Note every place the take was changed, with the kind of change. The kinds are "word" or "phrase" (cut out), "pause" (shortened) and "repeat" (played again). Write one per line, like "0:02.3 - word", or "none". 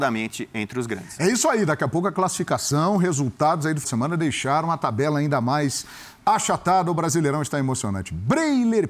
0:03.8 - word